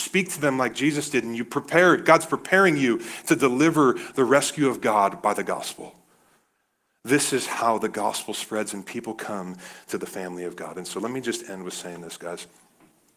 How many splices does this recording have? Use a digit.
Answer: 0